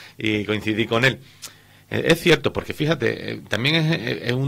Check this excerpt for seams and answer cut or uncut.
uncut